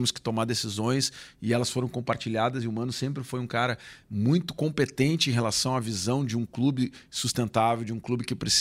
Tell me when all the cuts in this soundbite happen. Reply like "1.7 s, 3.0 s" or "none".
none

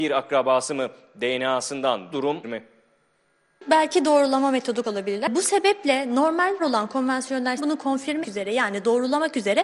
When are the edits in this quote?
2.1 s, 2.4 s, 4.8 s, 6.6 s, 7.6 s, 8.2 s

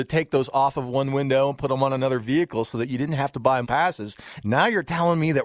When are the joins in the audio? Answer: 3.6 s

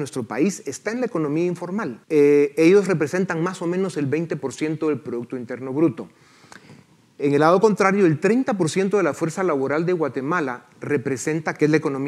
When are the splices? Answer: 2.0 s

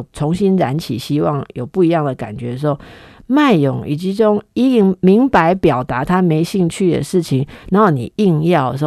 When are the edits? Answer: none

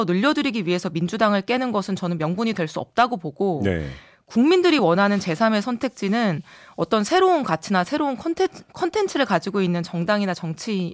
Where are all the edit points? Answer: none

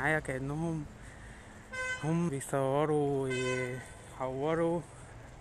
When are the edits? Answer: 2.3 s

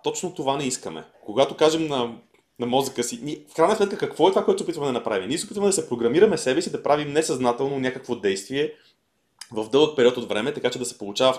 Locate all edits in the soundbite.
1.1 s

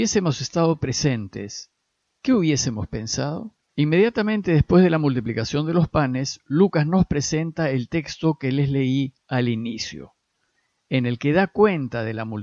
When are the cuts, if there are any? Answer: 3.7 s, 9.2 s

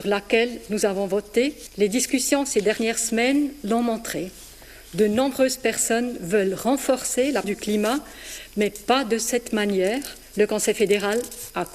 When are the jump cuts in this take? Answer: 7.4 s

